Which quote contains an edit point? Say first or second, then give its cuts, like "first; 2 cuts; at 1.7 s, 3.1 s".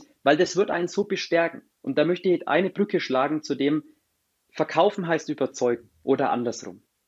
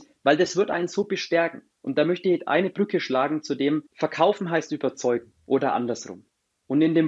second; 1 cut; at 3.9 s